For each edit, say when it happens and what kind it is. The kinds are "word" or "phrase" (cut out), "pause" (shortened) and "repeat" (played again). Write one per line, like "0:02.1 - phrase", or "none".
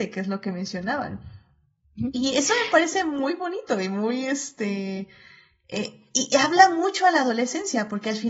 none